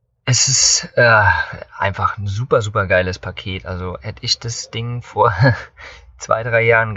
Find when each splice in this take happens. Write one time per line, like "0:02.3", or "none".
none